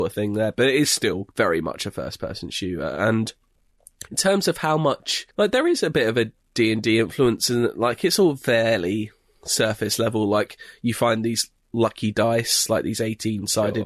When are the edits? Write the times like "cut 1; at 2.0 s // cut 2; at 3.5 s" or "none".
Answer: cut 1; at 1.3 s // cut 2; at 4.1 s // cut 3; at 5.3 s